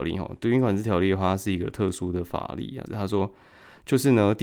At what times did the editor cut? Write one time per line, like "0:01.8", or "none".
0:02.9